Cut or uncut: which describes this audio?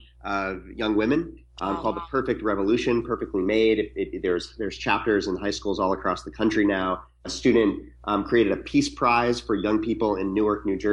cut